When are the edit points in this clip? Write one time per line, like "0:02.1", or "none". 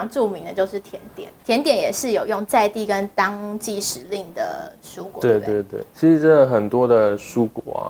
0:05.9